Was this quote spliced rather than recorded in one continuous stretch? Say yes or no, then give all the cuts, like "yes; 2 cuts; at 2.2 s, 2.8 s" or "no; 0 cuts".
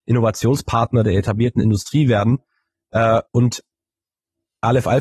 yes; 1 cut; at 3.3 s